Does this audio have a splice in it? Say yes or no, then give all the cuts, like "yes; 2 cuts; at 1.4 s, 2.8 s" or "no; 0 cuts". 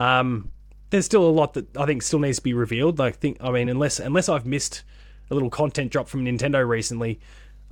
no; 0 cuts